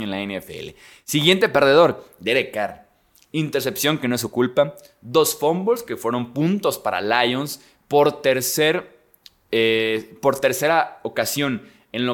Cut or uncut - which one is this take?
uncut